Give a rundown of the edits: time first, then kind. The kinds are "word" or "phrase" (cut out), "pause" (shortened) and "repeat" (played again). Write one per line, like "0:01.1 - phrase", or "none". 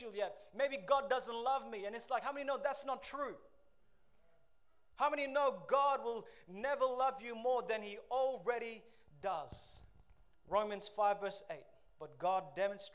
none